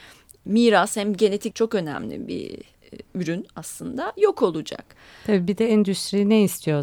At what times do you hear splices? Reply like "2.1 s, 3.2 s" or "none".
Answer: 1.5 s, 3.1 s